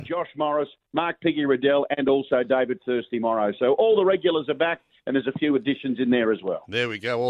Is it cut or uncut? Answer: uncut